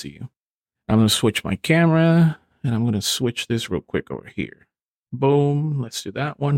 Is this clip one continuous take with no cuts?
yes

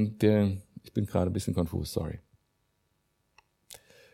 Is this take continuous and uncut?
yes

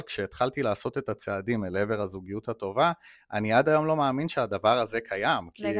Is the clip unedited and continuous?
yes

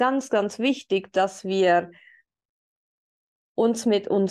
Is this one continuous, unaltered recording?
yes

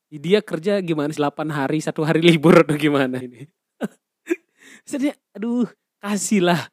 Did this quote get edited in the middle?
yes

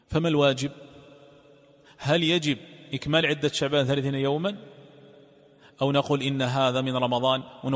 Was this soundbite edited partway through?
no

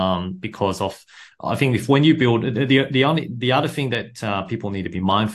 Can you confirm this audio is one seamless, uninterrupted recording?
yes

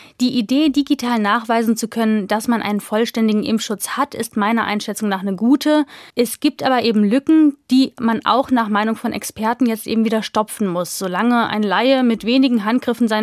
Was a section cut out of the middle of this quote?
yes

